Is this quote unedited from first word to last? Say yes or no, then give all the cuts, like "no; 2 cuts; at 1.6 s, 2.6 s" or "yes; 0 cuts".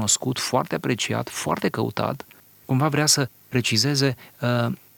yes; 0 cuts